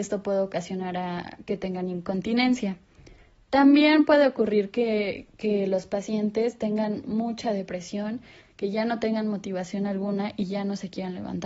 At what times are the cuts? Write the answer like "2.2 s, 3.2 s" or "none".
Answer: none